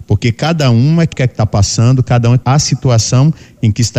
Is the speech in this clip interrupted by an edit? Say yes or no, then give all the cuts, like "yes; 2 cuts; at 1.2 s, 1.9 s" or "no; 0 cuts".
yes; 2 cuts; at 1.1 s, 2.4 s